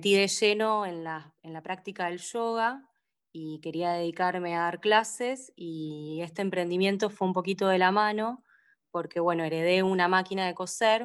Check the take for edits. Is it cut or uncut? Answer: uncut